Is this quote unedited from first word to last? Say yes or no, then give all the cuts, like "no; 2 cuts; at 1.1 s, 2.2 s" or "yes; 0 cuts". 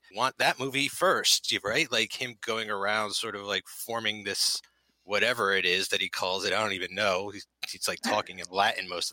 yes; 0 cuts